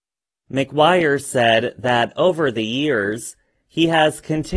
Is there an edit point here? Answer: no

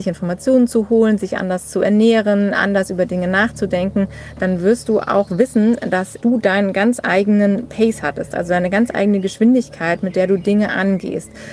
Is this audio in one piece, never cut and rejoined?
yes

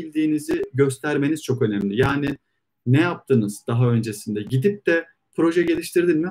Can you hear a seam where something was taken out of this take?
no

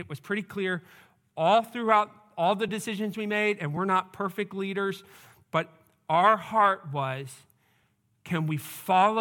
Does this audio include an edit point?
no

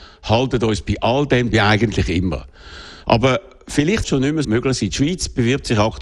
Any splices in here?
yes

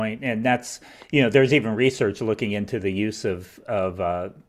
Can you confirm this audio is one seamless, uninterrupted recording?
yes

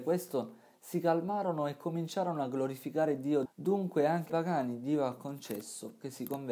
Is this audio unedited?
no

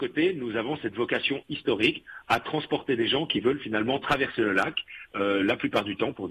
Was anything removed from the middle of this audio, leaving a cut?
no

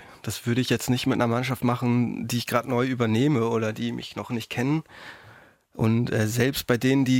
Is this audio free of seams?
yes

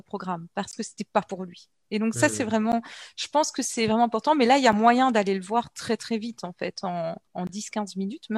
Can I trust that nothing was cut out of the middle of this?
no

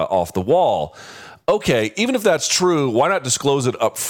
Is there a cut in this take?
no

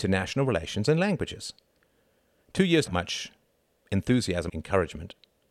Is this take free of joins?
no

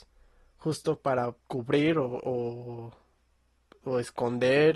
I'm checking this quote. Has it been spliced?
yes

